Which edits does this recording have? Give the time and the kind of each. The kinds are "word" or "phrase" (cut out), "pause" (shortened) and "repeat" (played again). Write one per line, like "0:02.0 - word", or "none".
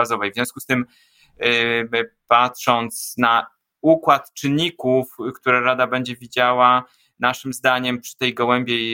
none